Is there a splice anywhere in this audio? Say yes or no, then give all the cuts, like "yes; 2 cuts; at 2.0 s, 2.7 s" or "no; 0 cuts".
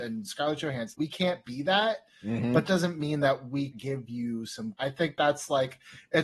yes; 4 cuts; at 0.9 s, 2.7 s, 3.7 s, 4.8 s